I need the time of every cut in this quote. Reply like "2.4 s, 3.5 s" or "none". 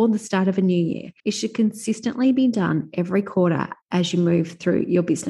1.2 s, 3.8 s

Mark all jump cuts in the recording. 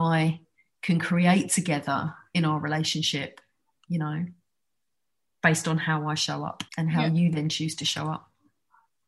6.7 s

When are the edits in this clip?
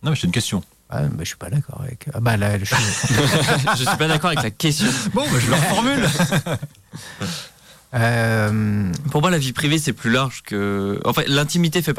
none

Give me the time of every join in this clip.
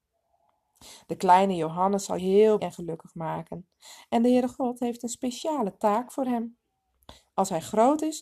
2.2 s, 2.6 s

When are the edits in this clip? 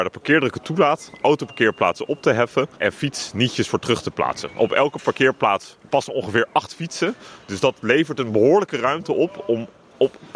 2.7 s

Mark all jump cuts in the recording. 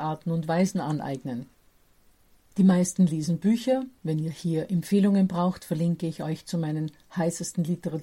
none

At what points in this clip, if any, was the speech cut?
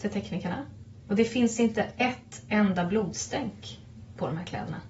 none

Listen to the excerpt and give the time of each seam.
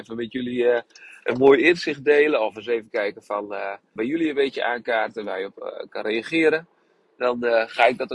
4.0 s

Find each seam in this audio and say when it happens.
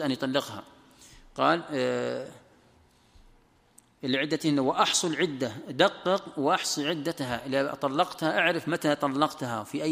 none

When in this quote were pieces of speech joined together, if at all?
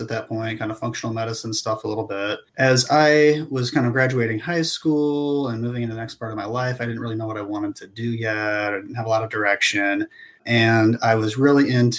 2.5 s

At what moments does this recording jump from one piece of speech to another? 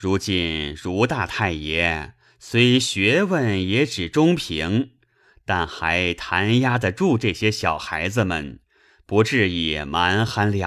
none

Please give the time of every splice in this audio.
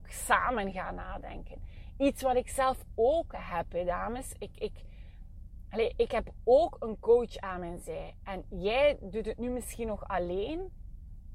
none

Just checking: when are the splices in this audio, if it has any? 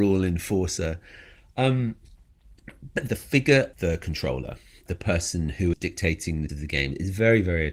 3.1 s, 3.7 s, 4.9 s, 5.7 s, 6.5 s

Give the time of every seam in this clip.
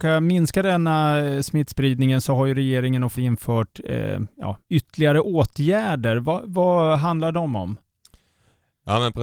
3.1 s, 4.6 s

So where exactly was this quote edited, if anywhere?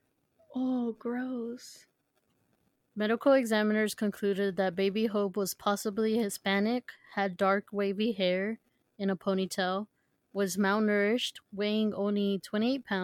none

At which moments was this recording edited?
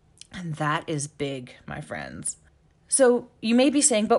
2.5 s

